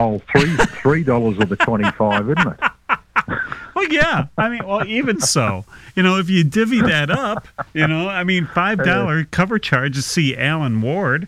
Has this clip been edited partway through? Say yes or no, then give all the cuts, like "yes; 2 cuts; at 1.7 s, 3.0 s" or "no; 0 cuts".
yes; 1 cut; at 5.1 s